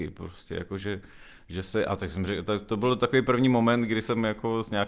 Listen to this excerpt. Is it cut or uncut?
uncut